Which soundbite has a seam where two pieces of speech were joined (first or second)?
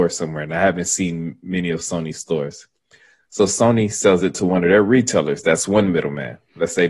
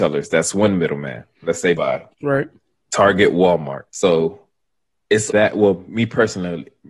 second